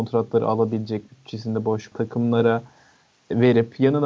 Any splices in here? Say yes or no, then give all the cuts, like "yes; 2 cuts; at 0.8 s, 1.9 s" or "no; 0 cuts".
yes; 2 cuts; at 1.1 s, 1.9 s